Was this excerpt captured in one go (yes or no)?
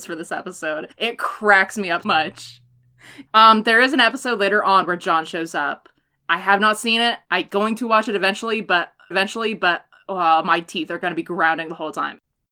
no